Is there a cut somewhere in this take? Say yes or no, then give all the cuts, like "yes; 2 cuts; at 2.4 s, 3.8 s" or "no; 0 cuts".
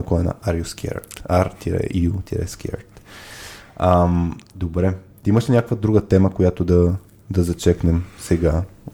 no; 0 cuts